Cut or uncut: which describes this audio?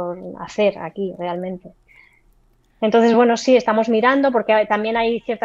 uncut